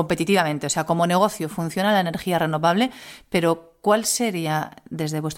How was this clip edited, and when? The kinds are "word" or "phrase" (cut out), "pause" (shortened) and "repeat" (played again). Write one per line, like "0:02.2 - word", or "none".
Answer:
none